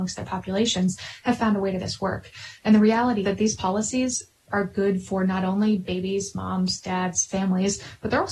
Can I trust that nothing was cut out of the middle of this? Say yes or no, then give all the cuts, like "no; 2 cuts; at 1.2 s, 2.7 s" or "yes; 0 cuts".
no; 2 cuts; at 1.8 s, 3.2 s